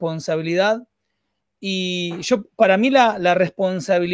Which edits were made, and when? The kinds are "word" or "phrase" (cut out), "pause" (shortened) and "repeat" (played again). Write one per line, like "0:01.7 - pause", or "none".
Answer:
none